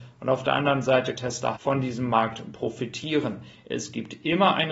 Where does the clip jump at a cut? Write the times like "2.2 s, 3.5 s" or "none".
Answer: 1.2 s, 1.6 s

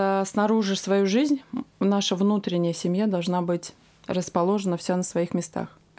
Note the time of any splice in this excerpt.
none

